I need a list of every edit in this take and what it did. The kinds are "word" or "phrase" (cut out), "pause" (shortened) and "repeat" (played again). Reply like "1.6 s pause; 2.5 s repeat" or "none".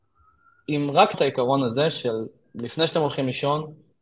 1.1 s word; 2.4 s pause

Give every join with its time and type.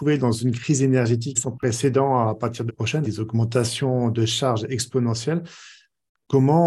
1.3 s word; 2.7 s word; 3.0 s word

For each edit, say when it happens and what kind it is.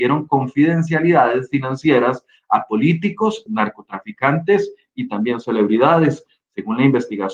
3.5 s word

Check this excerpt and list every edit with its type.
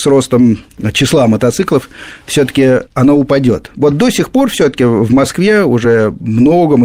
2.9 s pause

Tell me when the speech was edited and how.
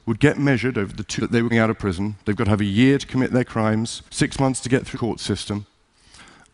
1.2 s word; 1.5 s word; 4.1 s pause; 4.9 s word

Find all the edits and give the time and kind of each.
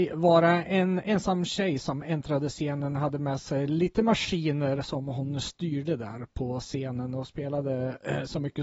none

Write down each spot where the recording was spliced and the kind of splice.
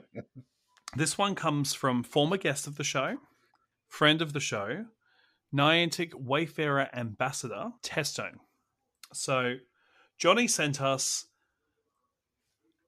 7.8 s pause

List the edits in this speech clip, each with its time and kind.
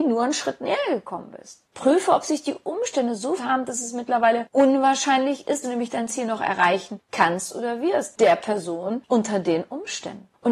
1.7 s pause; 3.4 s word; 5.6 s word; 8.2 s word

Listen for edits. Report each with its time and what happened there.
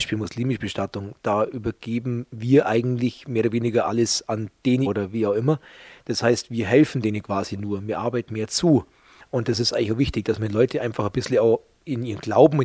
4.9 s phrase; 8.3 s word

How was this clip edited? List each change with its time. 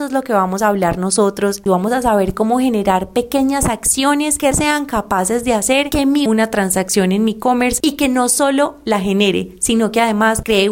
4.5 s word; 6.3 s phrase

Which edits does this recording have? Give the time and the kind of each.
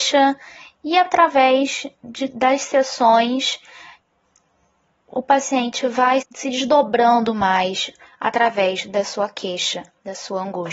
6.2 s word

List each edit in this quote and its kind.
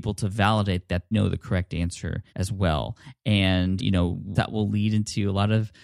1.1 s word; 2.3 s pause; 3.8 s word; 4.3 s word

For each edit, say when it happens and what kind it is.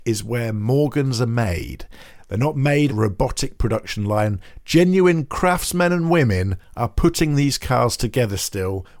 2.9 s phrase

